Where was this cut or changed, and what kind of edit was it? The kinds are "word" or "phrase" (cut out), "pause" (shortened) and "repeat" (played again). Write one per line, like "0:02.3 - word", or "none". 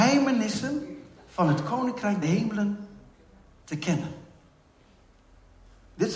0:02.2 - word